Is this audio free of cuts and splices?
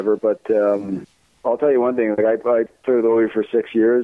yes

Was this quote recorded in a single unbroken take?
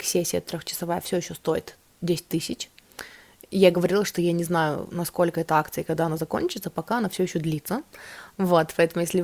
yes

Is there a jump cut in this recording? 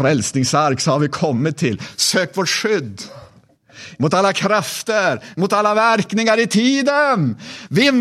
no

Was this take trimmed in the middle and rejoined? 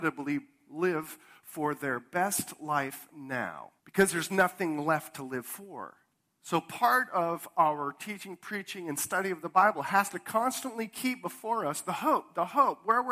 yes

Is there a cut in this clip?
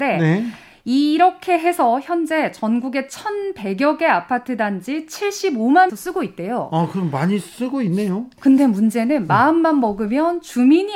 yes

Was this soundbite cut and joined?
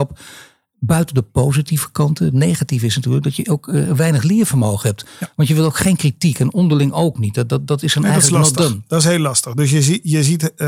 no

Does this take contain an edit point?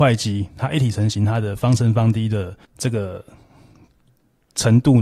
yes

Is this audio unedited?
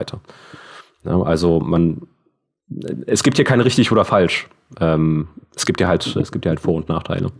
yes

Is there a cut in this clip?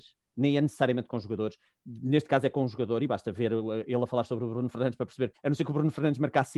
yes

